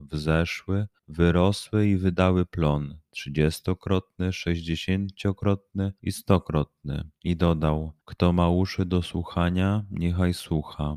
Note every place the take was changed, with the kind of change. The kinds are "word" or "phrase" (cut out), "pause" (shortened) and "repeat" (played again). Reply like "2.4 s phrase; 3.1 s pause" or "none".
1.0 s pause; 6.0 s pause; 7.2 s pause; 8.0 s pause